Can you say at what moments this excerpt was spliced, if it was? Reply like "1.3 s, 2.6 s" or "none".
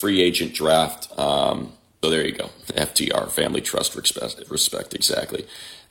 2.0 s